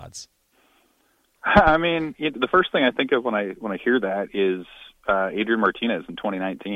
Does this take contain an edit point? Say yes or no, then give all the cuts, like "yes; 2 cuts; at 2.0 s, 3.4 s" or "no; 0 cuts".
no; 0 cuts